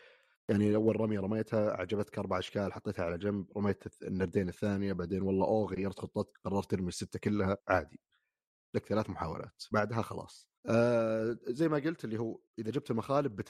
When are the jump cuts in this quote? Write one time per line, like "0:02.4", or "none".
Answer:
0:07.6
0:10.6
0:12.5